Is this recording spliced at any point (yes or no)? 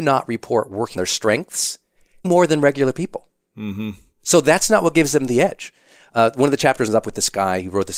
yes